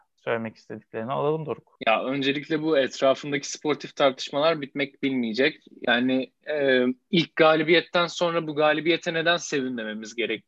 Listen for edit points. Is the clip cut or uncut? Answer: uncut